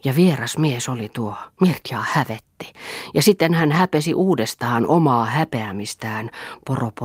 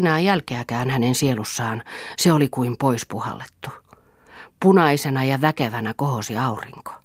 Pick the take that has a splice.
first; 1 cut; at 1.5 s

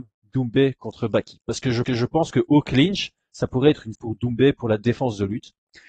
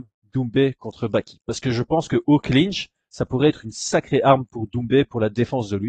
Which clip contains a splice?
first; 2 cuts; at 1.8 s, 3.9 s

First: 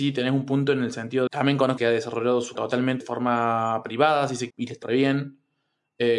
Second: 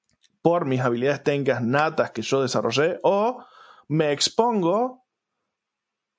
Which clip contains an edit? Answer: first; 6 cuts; at 1.3 s, 1.8 s, 2.6 s, 3.0 s, 4.5 s, 4.8 s

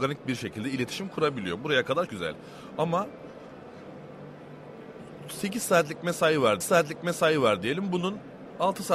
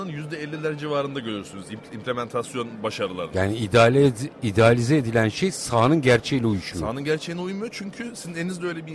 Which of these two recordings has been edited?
first; 2 cuts; at 2.1 s, 6.6 s

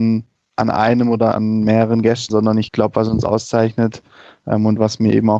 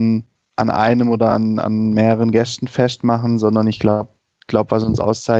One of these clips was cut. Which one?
first; 3 cuts; at 1.3 s, 2.3 s, 2.7 s

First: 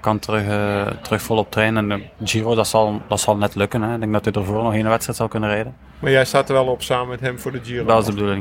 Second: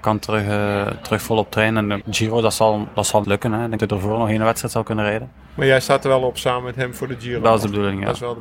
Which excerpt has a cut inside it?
second; 3 cuts; at 2.0 s, 3.2 s, 3.8 s

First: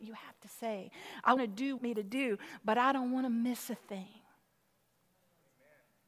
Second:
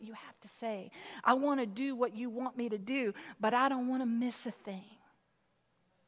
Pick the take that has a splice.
first; 2 cuts; at 1.4 s, 1.8 s

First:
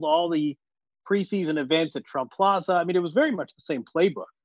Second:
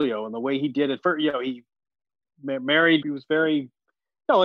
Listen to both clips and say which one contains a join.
second; 1 cut; at 3.0 s

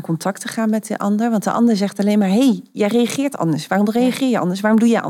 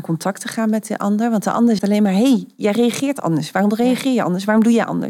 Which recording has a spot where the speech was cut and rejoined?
second; 1 cut; at 1.8 s

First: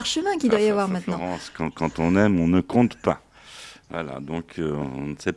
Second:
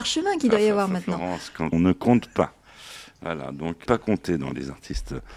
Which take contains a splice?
second; 2 cuts; at 1.7 s, 3.9 s

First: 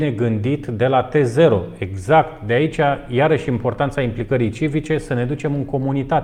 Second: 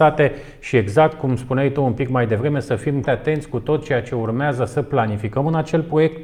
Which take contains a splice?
second; 1 cut; at 3.0 s

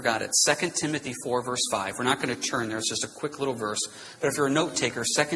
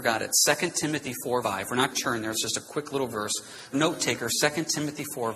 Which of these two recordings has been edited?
second; 3 cuts; at 1.4 s, 1.9 s, 3.7 s

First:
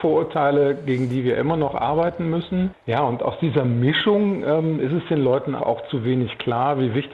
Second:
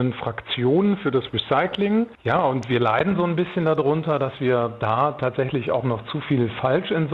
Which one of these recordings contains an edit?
first; 1 cut; at 5.6 s

